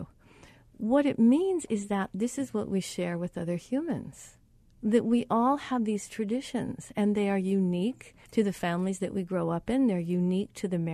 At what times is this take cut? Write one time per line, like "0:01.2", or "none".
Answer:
0:04.6
0:08.2